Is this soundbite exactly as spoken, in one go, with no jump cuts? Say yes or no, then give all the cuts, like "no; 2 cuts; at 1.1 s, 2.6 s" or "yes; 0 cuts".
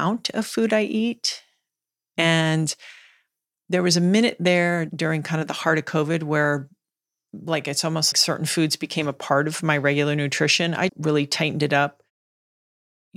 no; 2 cuts; at 8.1 s, 10.9 s